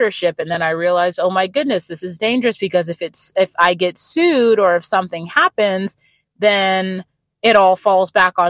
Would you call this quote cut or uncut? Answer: uncut